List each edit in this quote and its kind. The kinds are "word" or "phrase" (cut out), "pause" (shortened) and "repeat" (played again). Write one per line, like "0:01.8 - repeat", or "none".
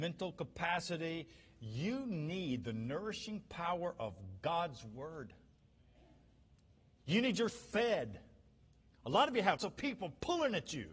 0:07.5 - word
0:09.6 - word